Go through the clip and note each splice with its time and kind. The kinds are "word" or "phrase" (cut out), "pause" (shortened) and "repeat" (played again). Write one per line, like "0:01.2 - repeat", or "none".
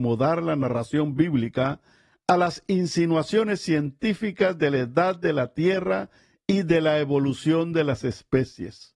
none